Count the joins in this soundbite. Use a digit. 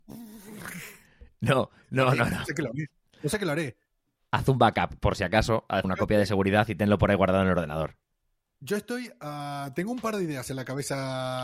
1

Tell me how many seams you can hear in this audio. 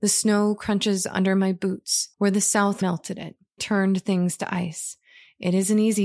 3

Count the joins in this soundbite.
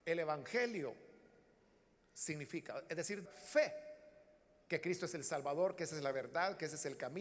1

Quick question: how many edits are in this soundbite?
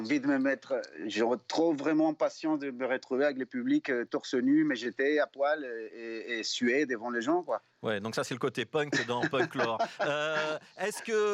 0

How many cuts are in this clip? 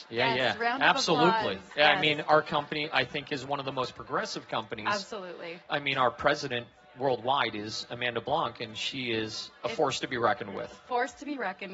0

